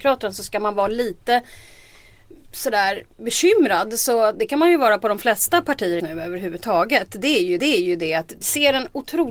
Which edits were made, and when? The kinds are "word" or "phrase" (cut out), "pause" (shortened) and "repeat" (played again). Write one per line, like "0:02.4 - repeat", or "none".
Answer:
0:03.1 - pause
0:06.0 - word
0:07.6 - repeat
0:08.4 - word